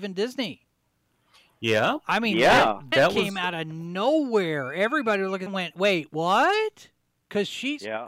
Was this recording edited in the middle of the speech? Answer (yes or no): yes